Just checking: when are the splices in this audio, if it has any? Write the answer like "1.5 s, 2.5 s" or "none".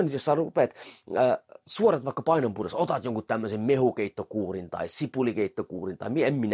none